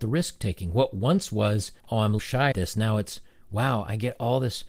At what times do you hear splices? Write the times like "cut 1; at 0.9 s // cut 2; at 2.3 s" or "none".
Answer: cut 1; at 1.8 s // cut 2; at 2.2 s // cut 3; at 2.5 s